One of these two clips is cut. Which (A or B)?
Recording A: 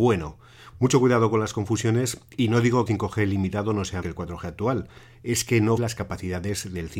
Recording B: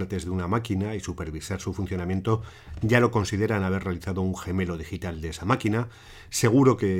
A